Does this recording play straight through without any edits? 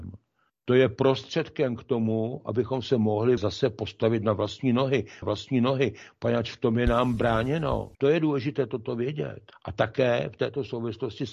no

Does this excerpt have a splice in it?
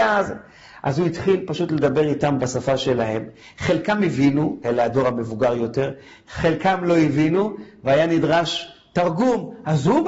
no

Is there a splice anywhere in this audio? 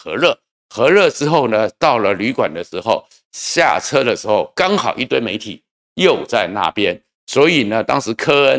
no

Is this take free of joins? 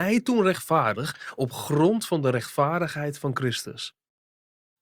yes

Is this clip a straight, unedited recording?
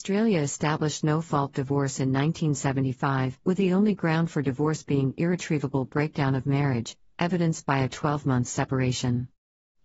no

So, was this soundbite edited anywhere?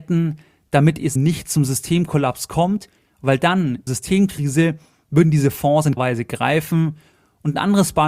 yes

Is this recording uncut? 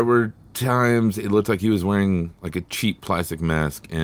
yes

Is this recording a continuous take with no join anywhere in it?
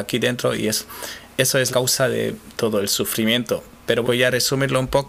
no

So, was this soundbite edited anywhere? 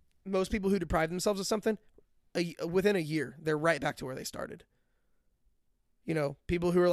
no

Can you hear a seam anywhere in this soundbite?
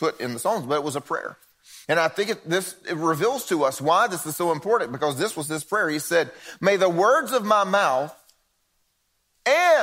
no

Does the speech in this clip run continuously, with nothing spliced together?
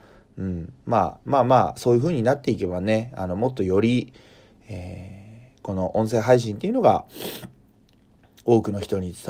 yes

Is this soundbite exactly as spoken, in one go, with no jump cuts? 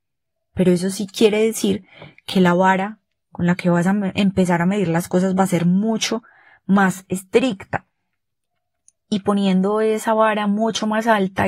yes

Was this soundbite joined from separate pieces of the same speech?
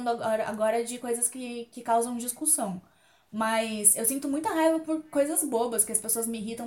no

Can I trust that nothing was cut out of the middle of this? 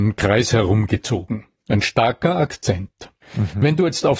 no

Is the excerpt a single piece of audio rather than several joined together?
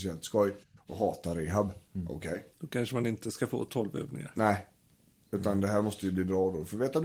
no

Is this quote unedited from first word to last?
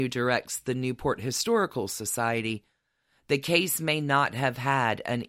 yes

